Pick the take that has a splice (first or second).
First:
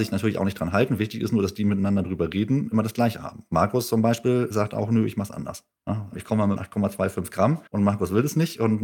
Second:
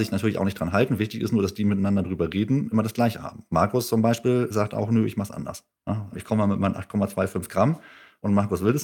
first